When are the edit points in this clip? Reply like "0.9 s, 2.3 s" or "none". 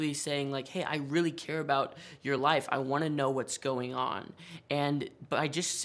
none